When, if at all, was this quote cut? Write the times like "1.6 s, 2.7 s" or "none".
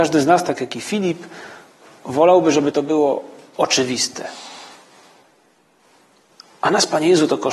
none